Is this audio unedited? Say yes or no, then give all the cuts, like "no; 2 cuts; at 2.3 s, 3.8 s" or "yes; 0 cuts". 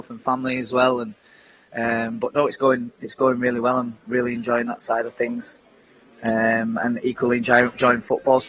yes; 0 cuts